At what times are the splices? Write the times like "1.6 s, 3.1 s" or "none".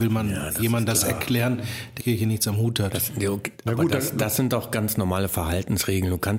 2.0 s